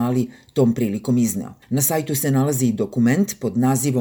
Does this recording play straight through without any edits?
no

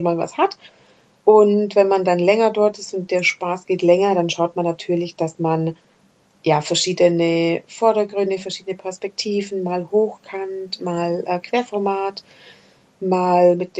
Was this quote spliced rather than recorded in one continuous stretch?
no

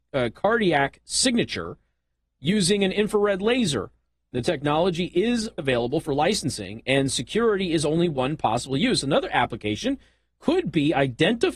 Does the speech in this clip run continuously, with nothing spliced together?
no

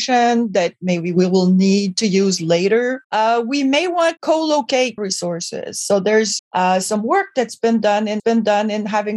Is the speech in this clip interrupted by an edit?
yes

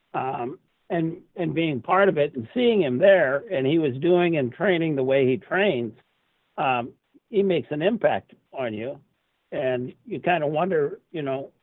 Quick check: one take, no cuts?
yes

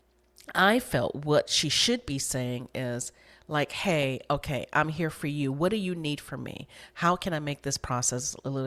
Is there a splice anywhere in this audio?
no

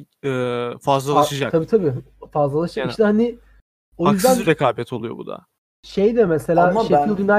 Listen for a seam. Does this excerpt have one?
no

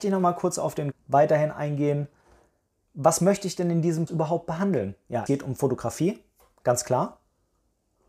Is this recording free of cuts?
no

